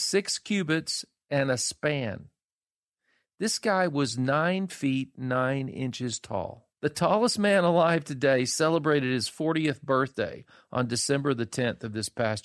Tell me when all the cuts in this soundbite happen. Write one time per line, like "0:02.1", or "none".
0:06.7